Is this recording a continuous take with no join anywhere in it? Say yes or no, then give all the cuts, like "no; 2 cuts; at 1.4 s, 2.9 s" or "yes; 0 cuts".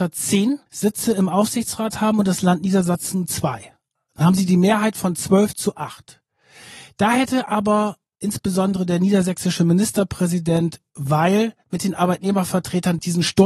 yes; 0 cuts